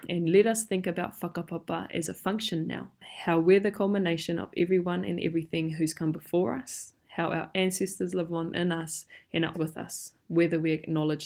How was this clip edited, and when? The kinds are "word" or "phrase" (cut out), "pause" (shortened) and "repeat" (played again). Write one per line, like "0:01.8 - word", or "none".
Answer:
0:09.5 - word